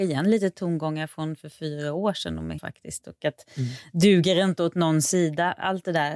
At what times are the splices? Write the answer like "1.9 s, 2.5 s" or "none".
2.6 s